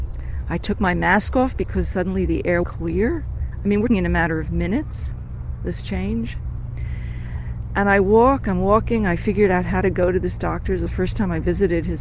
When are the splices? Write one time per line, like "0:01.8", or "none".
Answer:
0:02.6
0:03.9
0:10.9